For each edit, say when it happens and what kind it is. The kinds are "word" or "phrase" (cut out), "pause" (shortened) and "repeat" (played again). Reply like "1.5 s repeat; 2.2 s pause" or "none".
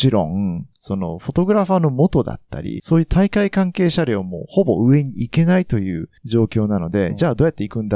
2.8 s phrase; 6.2 s pause